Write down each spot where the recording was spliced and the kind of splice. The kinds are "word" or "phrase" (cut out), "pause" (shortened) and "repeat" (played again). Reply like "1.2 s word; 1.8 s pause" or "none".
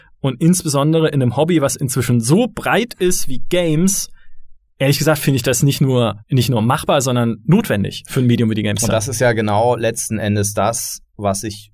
4.7 s pause; 6.2 s pause

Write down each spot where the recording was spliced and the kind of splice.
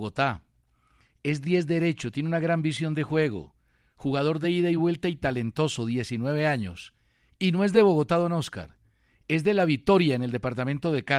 none

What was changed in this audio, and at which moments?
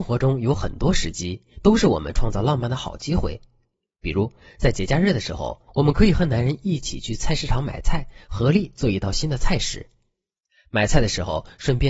5.7 s pause

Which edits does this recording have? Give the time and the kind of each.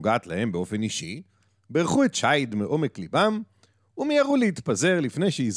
none

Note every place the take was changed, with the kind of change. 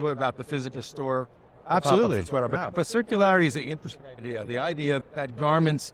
5.0 s word

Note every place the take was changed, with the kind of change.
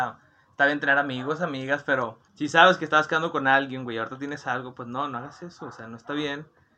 2.3 s pause

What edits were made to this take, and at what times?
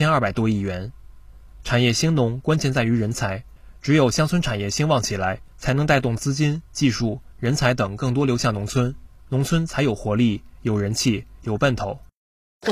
5.5 s pause; 6.7 s pause

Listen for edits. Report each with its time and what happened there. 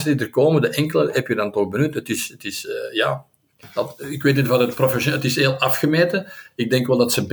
none

